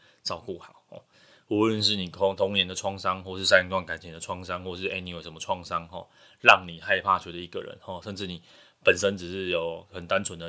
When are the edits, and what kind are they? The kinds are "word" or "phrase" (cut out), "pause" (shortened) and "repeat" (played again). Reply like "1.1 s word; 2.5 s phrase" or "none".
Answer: none